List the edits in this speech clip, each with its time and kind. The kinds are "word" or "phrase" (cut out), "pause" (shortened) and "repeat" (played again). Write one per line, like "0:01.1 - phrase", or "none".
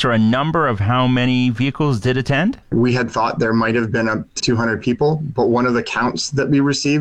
0:02.6 - pause
0:04.4 - word